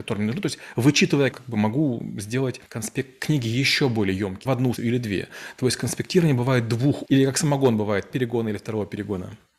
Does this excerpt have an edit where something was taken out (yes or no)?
yes